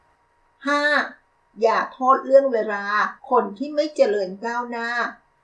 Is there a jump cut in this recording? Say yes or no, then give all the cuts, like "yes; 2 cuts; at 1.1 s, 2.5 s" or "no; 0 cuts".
yes; 1 cut; at 3.2 s